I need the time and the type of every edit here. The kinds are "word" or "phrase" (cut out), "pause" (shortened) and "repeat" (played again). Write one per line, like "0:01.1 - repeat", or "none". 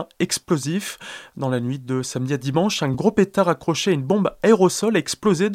none